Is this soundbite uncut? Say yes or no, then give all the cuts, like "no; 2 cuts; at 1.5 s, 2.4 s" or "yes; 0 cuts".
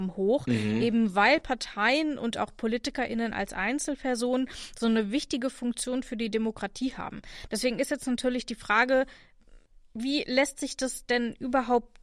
yes; 0 cuts